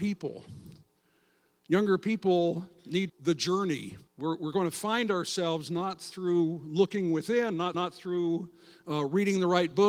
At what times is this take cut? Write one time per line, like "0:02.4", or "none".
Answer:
0:03.1
0:04.1
0:07.7